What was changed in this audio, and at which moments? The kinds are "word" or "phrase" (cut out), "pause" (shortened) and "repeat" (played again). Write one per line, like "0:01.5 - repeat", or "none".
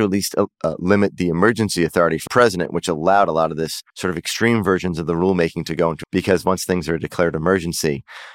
0:02.3 - word
0:03.9 - pause
0:06.0 - word